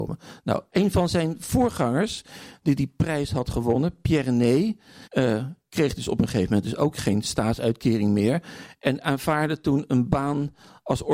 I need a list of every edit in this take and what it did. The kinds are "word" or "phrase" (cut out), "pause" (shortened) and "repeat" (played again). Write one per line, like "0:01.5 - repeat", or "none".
0:05.1 - pause